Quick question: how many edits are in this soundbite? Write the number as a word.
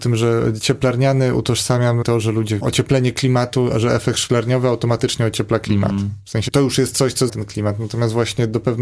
four